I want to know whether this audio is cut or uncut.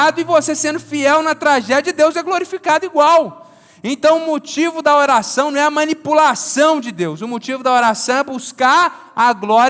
uncut